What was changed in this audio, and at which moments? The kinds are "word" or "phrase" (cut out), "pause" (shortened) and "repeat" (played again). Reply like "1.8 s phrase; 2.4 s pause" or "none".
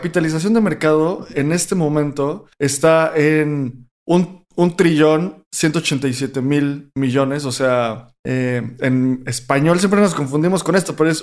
2.5 s pause; 8.2 s pause